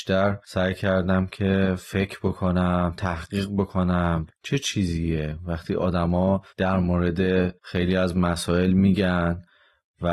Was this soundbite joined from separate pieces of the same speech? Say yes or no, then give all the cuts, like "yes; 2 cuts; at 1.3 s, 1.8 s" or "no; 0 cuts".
yes; 3 cuts; at 4.3 s, 6.5 s, 7.6 s